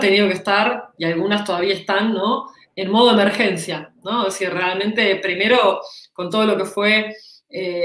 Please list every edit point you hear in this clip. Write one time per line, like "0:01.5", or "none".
none